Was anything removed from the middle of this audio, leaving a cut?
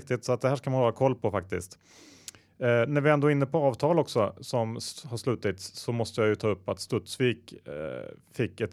no; 0 cuts

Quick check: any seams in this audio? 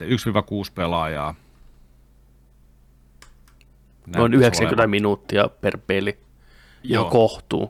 no; 0 cuts

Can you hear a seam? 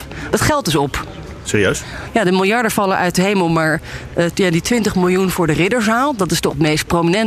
no; 0 cuts

